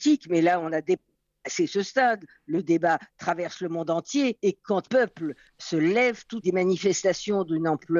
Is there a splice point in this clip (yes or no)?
yes